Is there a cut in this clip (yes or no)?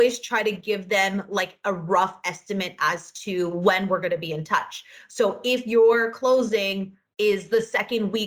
no